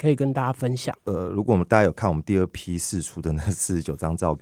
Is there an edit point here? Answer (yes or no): yes